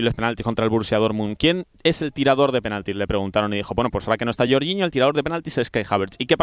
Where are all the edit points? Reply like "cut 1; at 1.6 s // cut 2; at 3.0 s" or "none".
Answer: none